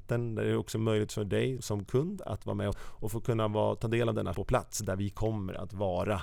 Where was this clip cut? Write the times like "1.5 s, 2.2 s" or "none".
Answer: 1.6 s, 2.7 s, 4.3 s